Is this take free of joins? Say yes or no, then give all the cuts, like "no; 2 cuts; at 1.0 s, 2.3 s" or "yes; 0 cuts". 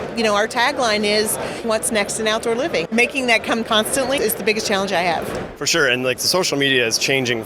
no; 4 cuts; at 1.6 s, 2.9 s, 3.6 s, 4.2 s